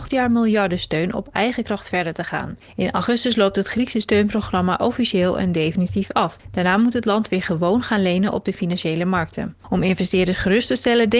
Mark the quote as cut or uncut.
uncut